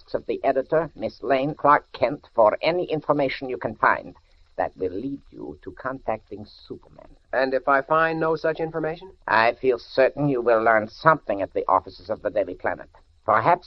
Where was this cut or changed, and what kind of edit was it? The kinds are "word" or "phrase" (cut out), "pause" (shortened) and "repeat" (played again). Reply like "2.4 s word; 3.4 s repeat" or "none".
1.6 s word